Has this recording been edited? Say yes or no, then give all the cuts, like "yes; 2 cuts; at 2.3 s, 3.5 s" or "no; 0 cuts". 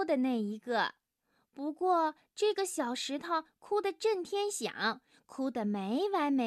no; 0 cuts